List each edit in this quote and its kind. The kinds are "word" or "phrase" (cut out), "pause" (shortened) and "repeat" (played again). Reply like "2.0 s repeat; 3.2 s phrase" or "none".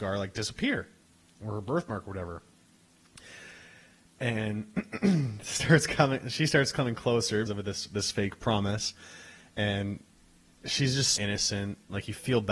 7.5 s word; 11.2 s word